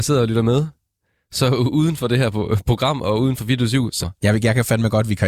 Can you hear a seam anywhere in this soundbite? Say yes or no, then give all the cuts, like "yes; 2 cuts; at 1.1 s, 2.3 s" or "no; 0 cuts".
yes; 1 cut; at 4.0 s